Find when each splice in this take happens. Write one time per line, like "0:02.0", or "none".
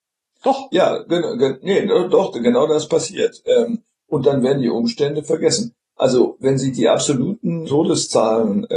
0:07.6

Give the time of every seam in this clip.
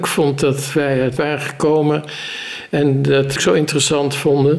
0:01.2
0:03.4

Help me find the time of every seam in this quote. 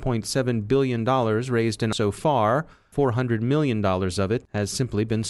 0:01.9
0:02.9

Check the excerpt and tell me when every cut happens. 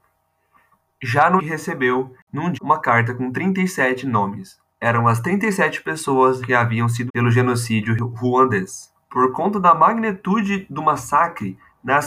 0:01.4
0:02.5
0:04.7
0:06.4
0:07.1
0:09.0

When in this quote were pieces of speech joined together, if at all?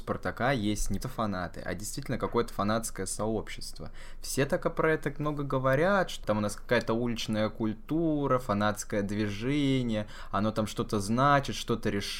0:01.0
0:06.2

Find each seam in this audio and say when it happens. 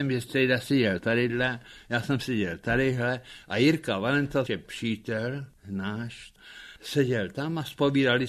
0:04.5
0:06.8

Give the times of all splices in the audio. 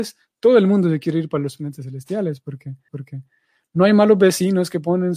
0:02.9

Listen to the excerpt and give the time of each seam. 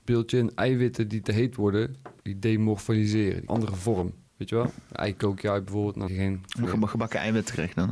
0:02.2
0:03.5
0:04.3
0:06.1
0:06.6

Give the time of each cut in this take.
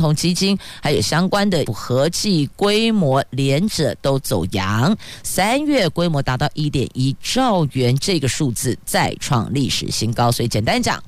0:01.7

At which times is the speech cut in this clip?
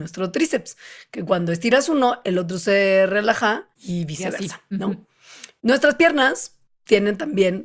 0:03.7

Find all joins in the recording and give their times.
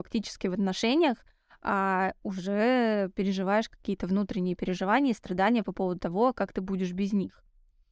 none

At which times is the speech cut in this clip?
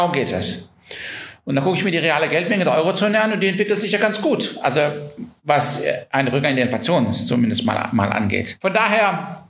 none

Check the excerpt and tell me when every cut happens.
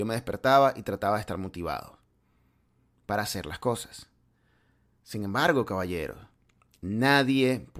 none

